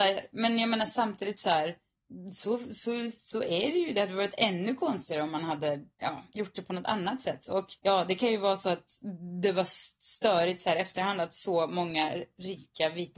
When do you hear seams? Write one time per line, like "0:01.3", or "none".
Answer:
0:05.9
0:07.8